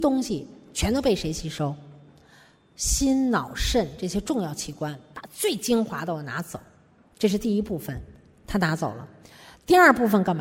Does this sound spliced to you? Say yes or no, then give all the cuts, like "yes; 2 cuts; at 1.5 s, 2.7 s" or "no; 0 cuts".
no; 0 cuts